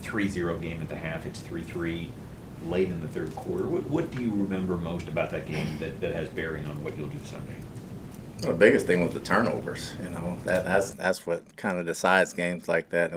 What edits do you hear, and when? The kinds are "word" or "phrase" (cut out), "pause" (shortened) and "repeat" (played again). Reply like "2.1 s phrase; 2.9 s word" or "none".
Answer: 11.5 s pause